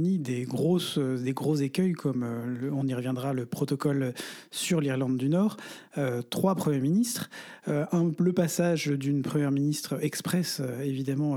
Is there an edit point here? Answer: no; 0 cuts

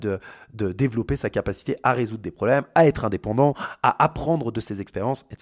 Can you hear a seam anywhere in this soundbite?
no; 0 cuts

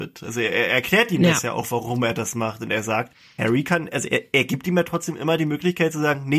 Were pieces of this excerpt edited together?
no; 0 cuts

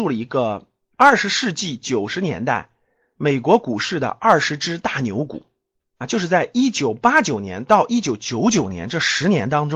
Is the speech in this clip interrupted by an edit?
no; 0 cuts

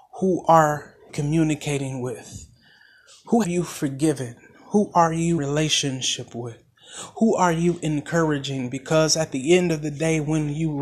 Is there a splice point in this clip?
yes; 3 cuts; at 1.1 s, 3.4 s, 5.4 s

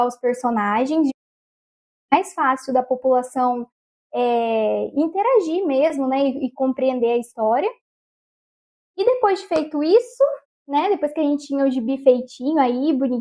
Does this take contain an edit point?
no; 0 cuts

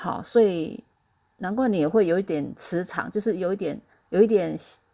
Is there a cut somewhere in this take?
yes; 1 cut; at 3.9 s

